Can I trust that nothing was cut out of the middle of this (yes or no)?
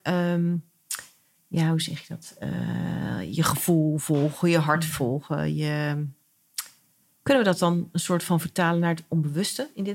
yes